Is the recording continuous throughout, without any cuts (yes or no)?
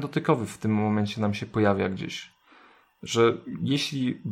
yes